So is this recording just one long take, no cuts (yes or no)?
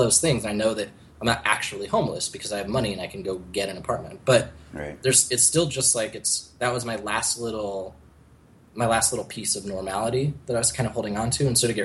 yes